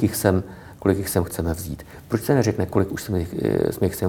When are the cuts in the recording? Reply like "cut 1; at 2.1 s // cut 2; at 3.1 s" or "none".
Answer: none